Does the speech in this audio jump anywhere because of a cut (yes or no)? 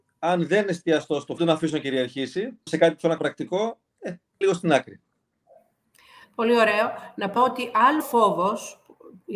yes